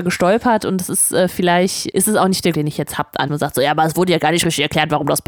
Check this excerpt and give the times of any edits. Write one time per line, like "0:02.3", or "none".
0:01.9
0:02.5
0:03.3